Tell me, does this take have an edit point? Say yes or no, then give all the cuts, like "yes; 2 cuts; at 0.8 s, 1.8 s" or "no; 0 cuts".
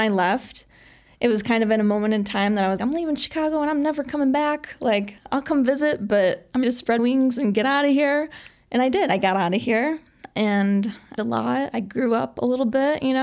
yes; 4 cuts; at 2.8 s, 6.6 s, 7.0 s, 11.2 s